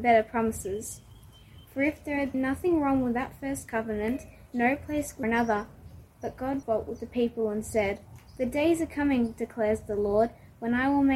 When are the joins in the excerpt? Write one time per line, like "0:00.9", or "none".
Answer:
0:02.3
0:05.2
0:06.6
0:08.3